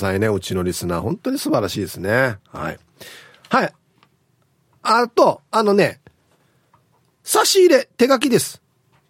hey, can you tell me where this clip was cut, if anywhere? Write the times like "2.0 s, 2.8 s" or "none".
none